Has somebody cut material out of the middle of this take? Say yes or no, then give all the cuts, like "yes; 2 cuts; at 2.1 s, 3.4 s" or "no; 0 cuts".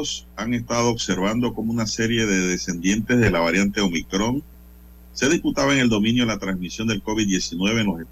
no; 0 cuts